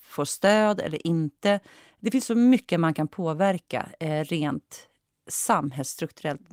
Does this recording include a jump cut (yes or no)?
no